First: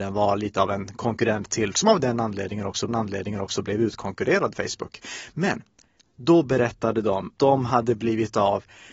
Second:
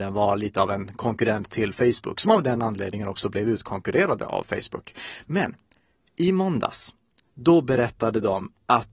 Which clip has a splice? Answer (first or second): first